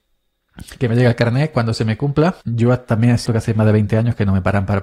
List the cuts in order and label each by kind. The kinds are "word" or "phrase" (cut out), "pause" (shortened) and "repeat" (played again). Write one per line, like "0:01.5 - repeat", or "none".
0:02.4 - pause
0:03.3 - word